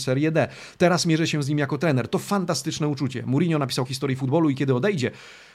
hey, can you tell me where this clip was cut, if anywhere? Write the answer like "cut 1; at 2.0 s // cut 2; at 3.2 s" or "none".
cut 1; at 3.9 s

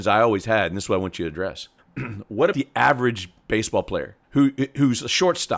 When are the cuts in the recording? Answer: cut 1; at 1.8 s // cut 2; at 2.5 s // cut 3; at 4.2 s

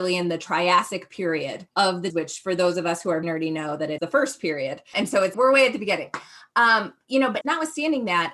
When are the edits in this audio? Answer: cut 1; at 1.7 s // cut 2; at 2.1 s // cut 3; at 3.2 s // cut 4; at 4.0 s // cut 5; at 5.3 s // cut 6; at 7.4 s

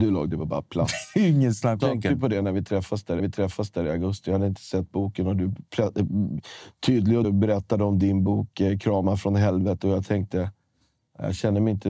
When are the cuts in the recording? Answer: cut 1; at 1.8 s // cut 2; at 3.2 s // cut 3; at 5.7 s // cut 4; at 7.2 s

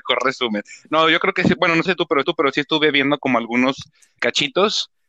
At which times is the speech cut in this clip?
cut 1; at 1.9 s // cut 2; at 2.2 s // cut 3; at 4.2 s

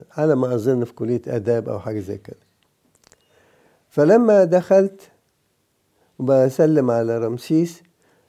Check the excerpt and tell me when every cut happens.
none

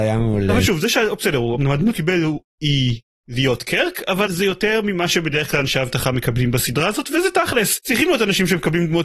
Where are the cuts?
cut 1; at 1.9 s // cut 2; at 4.3 s

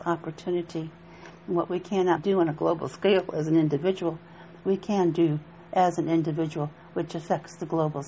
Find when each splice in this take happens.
cut 1; at 2.2 s

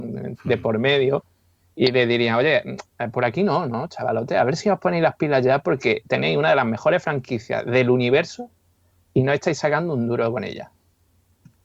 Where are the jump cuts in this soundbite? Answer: none

